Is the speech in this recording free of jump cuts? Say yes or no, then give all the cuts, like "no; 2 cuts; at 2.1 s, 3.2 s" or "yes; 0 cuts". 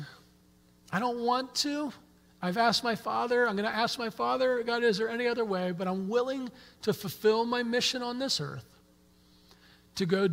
yes; 0 cuts